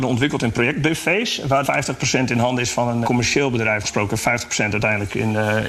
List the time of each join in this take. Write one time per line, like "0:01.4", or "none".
0:01.6
0:03.0
0:03.8